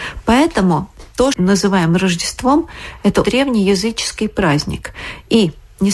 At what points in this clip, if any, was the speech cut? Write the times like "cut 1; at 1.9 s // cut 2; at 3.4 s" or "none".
cut 1; at 1.3 s // cut 2; at 3.2 s